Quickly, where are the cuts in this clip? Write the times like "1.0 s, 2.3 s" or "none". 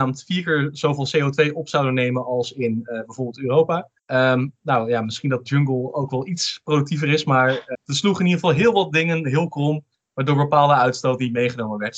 4.0 s, 7.7 s, 9.9 s